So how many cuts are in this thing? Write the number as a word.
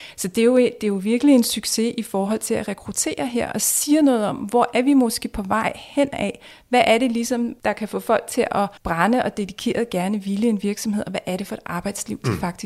two